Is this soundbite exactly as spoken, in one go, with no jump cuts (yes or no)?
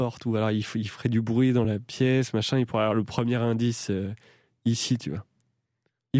yes